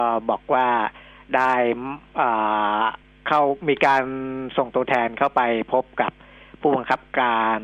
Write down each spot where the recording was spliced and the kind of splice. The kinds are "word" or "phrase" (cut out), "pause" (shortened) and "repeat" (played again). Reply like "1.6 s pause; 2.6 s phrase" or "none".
none